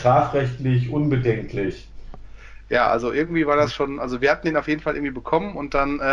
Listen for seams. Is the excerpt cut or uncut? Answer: uncut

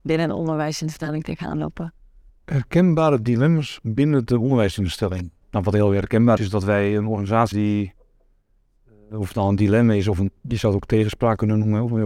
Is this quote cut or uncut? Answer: cut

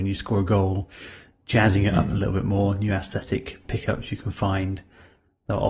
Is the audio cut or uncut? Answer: uncut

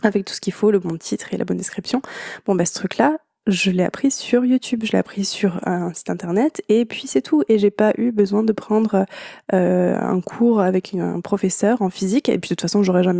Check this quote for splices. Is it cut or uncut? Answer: uncut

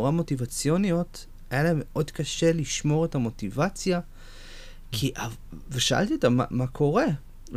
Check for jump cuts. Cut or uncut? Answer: uncut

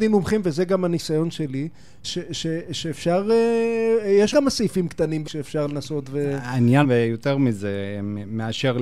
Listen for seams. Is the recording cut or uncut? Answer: cut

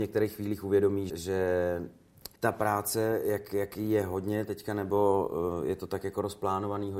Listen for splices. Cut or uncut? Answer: cut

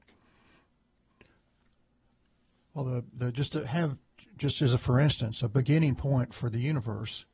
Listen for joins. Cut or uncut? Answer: uncut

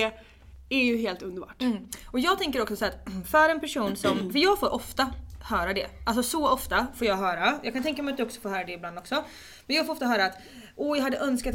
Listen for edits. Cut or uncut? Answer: uncut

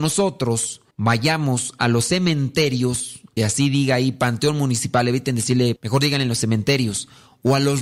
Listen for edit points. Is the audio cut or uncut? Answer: cut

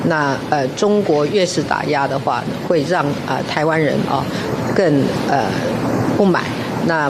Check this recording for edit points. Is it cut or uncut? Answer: uncut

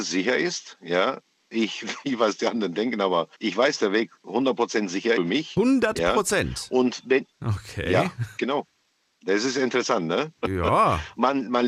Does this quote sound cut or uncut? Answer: cut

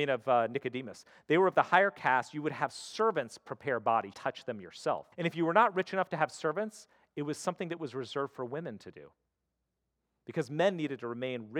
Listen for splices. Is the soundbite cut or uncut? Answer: cut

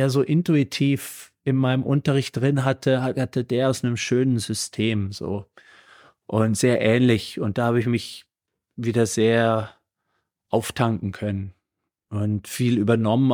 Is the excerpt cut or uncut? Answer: uncut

